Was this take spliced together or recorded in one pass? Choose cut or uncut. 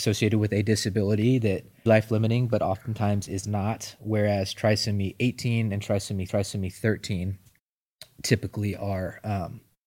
cut